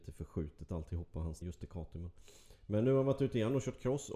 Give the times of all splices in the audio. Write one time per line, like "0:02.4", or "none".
0:01.4

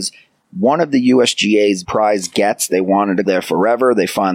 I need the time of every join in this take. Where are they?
0:01.8
0:03.2

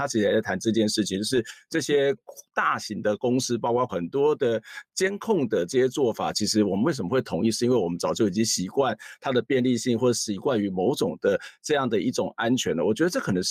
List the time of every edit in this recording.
0:03.9

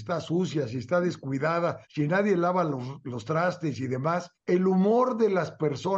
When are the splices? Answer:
0:01.8
0:04.4

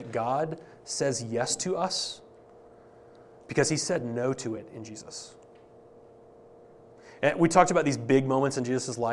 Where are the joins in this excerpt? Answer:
none

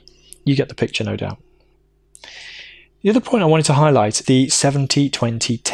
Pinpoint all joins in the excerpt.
0:04.2

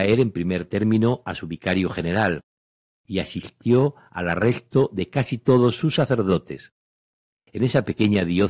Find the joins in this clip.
none

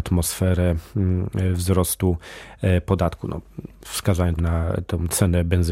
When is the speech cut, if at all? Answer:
0:04.4

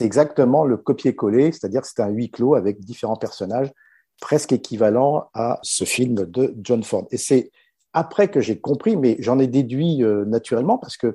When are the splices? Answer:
0:05.6

